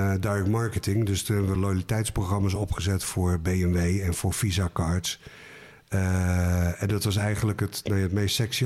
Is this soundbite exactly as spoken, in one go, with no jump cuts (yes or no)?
yes